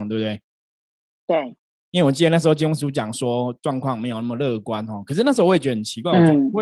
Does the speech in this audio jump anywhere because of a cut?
no; 0 cuts

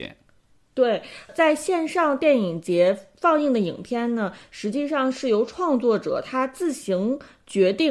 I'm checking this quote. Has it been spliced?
no; 0 cuts

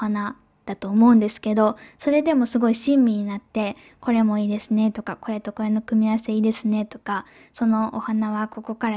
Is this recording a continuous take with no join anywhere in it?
yes; 0 cuts

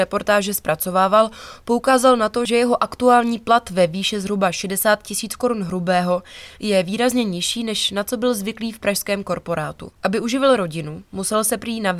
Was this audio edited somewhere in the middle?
yes; 1 cut; at 9.9 s

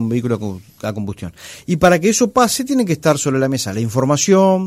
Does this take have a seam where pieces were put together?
no; 0 cuts

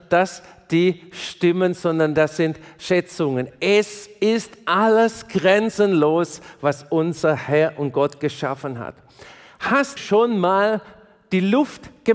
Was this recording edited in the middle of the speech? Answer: yes; 1 cut; at 10.0 s

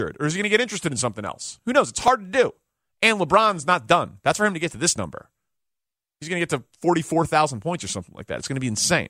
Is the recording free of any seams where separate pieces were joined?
yes; 0 cuts

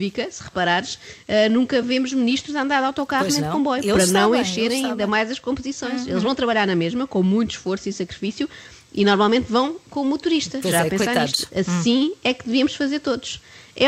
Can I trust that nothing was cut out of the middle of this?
yes; 0 cuts

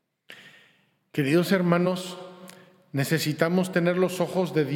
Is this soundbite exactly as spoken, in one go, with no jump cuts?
yes; 0 cuts

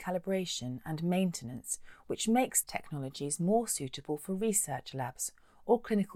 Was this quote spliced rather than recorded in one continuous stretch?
yes; 1 cut; at 2.6 s

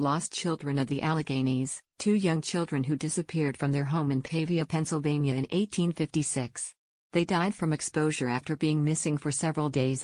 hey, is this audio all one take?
yes; 0 cuts

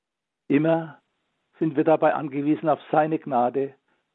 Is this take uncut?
yes; 0 cuts

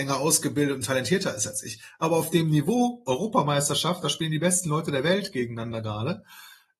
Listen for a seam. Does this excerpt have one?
no; 0 cuts

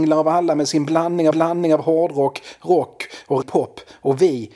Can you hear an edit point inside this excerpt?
yes; 2 cuts; at 1.3 s, 3.4 s

